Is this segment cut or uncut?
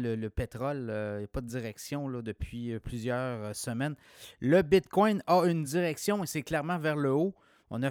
uncut